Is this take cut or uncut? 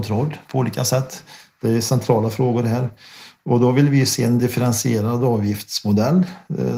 uncut